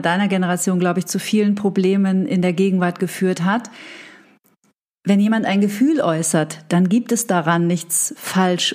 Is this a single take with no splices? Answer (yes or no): yes